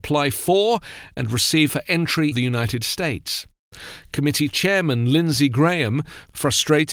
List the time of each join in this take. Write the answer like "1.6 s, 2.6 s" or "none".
1.7 s, 2.3 s